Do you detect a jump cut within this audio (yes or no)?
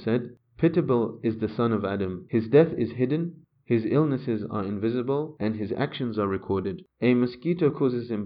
no